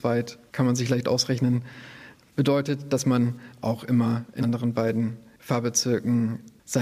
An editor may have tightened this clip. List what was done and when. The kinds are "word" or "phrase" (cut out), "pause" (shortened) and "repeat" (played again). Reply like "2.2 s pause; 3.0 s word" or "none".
4.4 s word

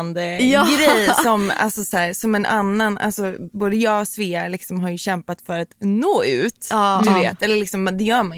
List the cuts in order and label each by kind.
none

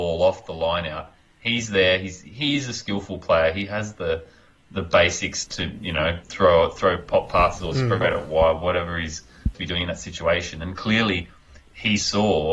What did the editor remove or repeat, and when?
5.5 s word; 6.2 s pause; 9.5 s phrase

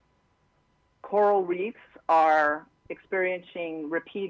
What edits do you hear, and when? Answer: none

